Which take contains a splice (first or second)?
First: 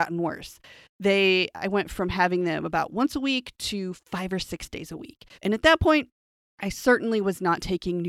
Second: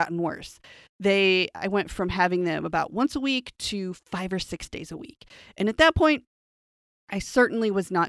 first